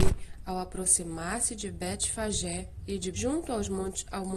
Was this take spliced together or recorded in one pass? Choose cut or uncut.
cut